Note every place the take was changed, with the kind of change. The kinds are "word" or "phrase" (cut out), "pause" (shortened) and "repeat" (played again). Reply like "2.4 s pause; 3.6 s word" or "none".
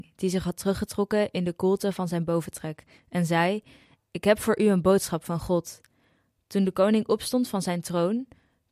none